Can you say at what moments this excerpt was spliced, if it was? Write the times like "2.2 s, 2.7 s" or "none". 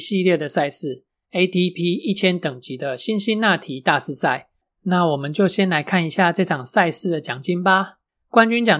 none